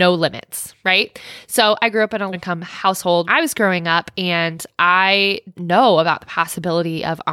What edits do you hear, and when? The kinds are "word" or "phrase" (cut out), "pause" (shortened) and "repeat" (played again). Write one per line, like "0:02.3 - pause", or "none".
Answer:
0:02.3 - word
0:03.3 - word
0:05.5 - word